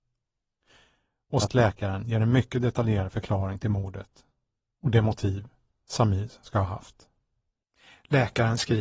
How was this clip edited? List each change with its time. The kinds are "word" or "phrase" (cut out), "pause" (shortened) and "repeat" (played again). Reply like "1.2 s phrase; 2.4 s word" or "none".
1.4 s word